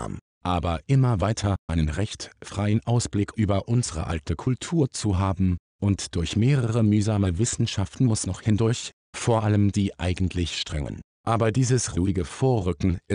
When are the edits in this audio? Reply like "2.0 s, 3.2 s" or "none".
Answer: 1.7 s, 8.3 s, 9.7 s